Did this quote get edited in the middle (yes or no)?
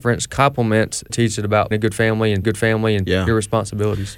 yes